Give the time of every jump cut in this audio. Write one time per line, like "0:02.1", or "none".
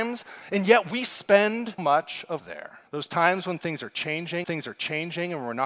0:01.8
0:02.4
0:02.9
0:04.4